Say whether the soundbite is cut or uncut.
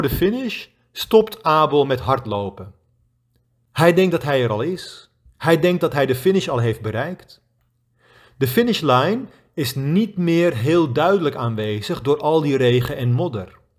uncut